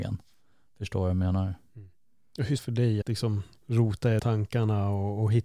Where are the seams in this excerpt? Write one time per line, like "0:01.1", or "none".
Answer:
0:02.6
0:03.0
0:03.5
0:04.2